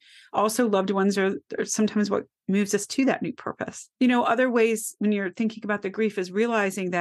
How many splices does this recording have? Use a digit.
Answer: 2